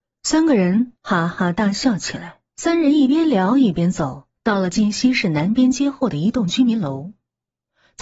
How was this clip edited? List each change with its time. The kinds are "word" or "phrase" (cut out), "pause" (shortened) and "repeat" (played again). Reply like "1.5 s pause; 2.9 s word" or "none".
1.0 s pause; 2.5 s pause; 4.4 s pause